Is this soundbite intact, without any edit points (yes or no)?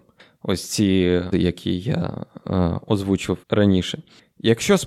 no